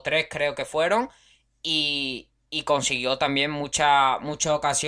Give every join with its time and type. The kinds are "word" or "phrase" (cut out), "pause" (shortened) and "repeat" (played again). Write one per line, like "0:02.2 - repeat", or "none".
none